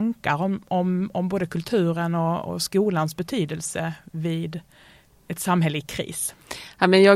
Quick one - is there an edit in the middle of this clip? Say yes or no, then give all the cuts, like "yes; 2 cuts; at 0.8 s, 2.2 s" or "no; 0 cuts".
no; 0 cuts